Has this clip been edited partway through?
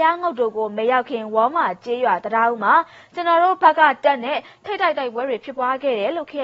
no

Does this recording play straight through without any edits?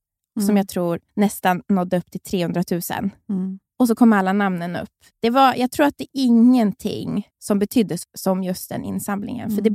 no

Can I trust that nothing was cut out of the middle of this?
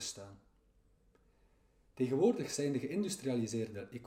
yes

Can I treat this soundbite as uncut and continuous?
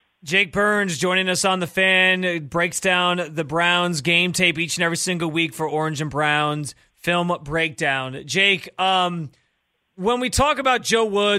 yes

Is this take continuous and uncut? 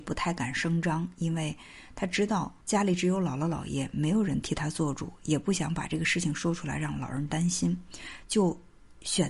no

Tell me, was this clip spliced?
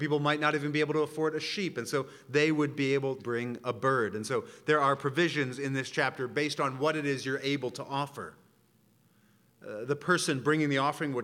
yes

